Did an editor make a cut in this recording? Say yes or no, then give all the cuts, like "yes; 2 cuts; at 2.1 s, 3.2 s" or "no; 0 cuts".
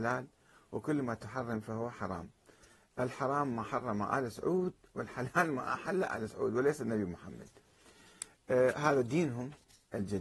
no; 0 cuts